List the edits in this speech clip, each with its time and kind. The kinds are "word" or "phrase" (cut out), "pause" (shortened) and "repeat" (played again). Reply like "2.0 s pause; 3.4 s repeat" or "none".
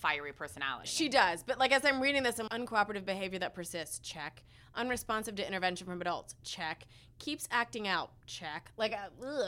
2.5 s word

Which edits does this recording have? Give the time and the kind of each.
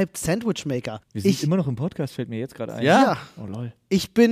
1.0 s pause

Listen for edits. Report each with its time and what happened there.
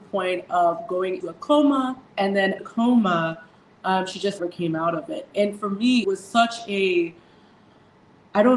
1.2 s word; 2.1 s pause; 2.6 s phrase; 4.4 s word; 5.3 s word; 6.0 s phrase

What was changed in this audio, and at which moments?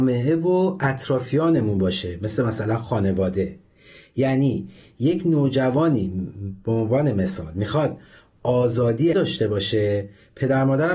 9.1 s word

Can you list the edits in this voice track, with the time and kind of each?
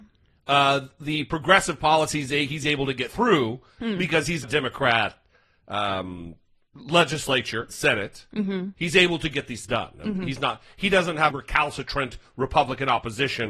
4.4 s word; 7.7 s word; 9.6 s word; 11.3 s word

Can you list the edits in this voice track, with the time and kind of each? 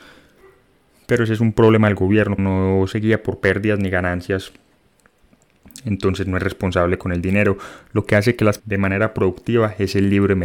2.4 s word; 8.6 s phrase

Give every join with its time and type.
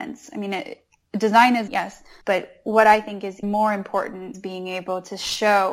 1.7 s word; 2.2 s pause; 3.4 s word; 4.3 s word

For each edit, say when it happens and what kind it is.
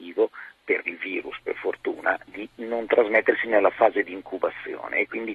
none

